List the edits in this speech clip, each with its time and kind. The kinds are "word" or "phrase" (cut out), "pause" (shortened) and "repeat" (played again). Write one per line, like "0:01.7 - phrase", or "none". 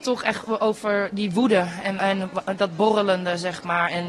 0:02.0 - word

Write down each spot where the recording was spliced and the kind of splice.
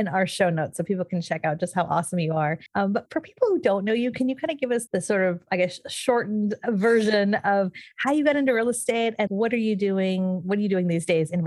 0:02.7 - pause
0:03.1 - word
0:04.9 - word
0:09.3 - word

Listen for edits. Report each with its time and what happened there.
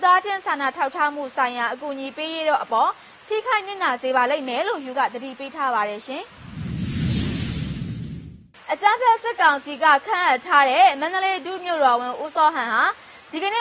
0:04.9 - word

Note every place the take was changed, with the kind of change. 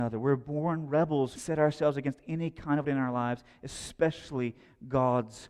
0:01.4 - phrase
0:02.8 - word

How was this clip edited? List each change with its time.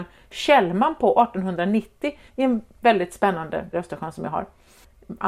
0:02.3 - pause
0:03.7 - phrase

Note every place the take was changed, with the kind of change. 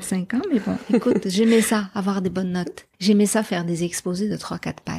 0:02.9 - pause

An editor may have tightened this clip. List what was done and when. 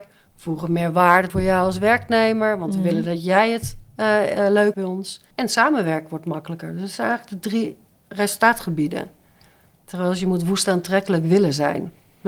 0:01.3 - word
0:03.9 - pause
0:04.7 - word
0:05.3 - pause
0:07.9 - pause

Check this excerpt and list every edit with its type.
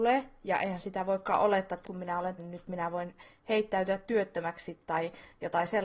0:01.8 - word
0:02.4 - word

